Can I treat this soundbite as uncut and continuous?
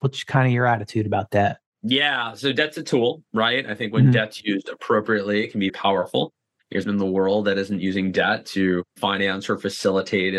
no; 4 cuts; at 3.2 s, 5.7 s, 6.8 s, 8.9 s

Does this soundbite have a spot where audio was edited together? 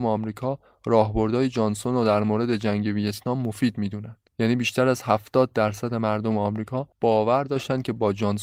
yes; 2 cuts; at 4.3 s, 6.9 s

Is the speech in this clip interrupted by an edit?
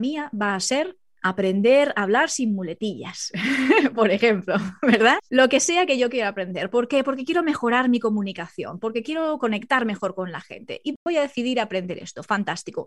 yes; 1 cut; at 5.3 s

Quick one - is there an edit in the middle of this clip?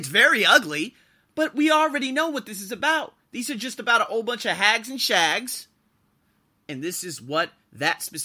no; 0 cuts

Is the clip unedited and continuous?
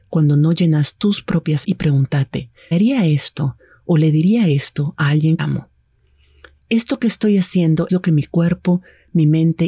no; 4 cuts; at 1.6 s, 2.7 s, 5.4 s, 7.9 s

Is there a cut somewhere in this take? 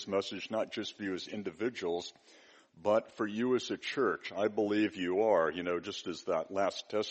no; 0 cuts

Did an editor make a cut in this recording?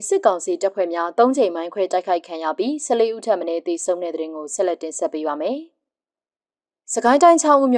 no; 0 cuts

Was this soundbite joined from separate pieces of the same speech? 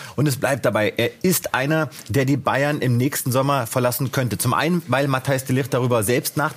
no; 0 cuts

